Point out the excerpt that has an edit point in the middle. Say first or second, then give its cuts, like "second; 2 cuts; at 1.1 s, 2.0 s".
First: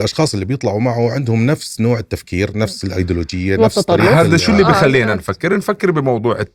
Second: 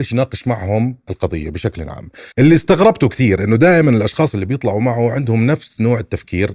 second; 1 cut; at 2.3 s